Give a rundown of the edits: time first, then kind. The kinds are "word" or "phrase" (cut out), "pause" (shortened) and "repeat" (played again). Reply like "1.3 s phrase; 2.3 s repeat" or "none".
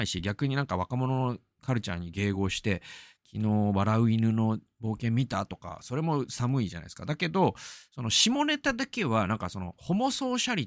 none